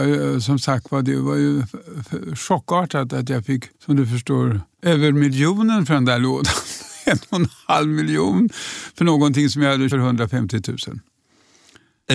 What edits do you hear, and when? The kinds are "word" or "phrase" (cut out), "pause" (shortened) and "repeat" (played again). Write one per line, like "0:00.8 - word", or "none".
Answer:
0:03.7 - pause
0:04.7 - pause
0:09.9 - phrase